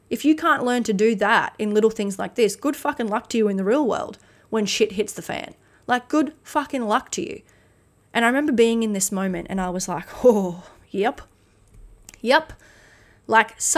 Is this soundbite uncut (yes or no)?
yes